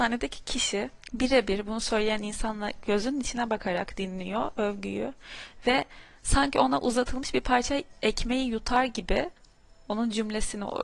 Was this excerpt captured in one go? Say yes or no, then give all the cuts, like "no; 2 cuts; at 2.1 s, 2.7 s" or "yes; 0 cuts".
no; 1 cut; at 1.0 s